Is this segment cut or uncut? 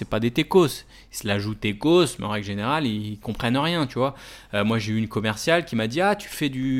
uncut